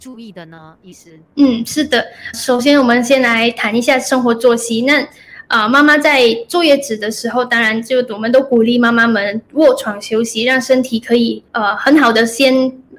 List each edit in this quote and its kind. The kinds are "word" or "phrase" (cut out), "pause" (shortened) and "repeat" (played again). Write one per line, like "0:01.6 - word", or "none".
0:01.3 - pause
0:02.3 - word
0:11.5 - pause